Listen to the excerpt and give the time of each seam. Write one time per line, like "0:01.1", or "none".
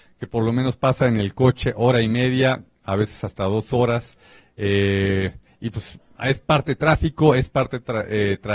none